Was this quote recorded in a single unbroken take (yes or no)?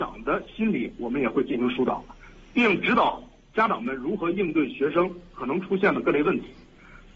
yes